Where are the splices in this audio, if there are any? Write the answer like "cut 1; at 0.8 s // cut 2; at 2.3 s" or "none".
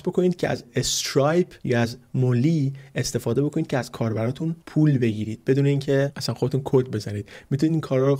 cut 1; at 1.6 s // cut 2; at 4.6 s